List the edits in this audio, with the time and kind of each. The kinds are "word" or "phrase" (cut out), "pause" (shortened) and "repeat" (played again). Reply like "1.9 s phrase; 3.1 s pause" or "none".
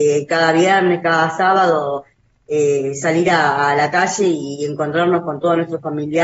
none